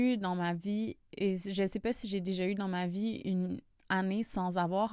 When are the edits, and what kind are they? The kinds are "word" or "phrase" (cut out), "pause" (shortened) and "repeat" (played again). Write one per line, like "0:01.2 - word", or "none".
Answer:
none